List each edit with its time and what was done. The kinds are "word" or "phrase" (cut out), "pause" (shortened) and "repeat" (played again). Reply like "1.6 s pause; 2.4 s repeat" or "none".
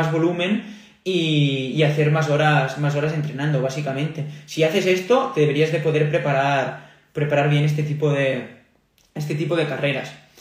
none